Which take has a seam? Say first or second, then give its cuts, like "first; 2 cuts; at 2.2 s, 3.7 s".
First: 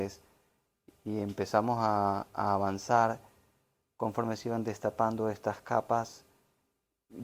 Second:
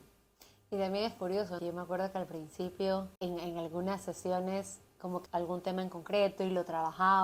second; 3 cuts; at 1.6 s, 3.2 s, 5.3 s